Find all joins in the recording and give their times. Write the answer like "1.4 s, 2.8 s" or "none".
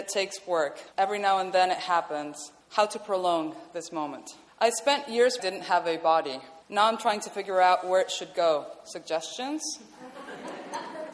0.9 s, 2.6 s, 4.5 s, 5.4 s, 6.6 s